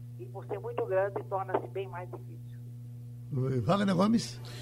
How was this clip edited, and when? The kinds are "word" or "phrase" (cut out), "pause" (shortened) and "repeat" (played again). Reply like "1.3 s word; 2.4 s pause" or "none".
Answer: none